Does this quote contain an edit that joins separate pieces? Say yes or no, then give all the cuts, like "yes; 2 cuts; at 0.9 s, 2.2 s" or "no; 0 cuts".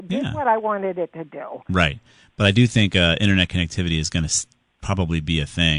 no; 0 cuts